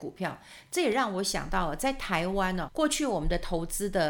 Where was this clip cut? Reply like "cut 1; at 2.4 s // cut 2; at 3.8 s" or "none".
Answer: cut 1; at 2.7 s